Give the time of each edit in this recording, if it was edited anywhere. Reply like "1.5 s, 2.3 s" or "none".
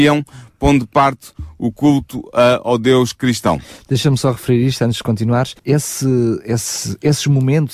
5.6 s